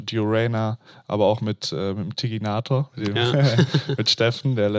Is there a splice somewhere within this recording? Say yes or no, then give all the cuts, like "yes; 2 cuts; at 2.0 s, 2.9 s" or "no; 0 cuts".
no; 0 cuts